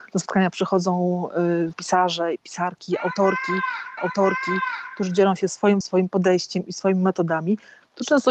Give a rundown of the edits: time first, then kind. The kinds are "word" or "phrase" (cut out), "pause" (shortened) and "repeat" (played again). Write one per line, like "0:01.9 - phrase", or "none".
0:01.7 - word
0:04.0 - repeat
0:05.8 - word